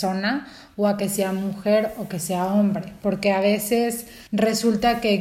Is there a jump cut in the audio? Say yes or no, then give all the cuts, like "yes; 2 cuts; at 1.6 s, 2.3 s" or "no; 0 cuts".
yes; 1 cut; at 4.3 s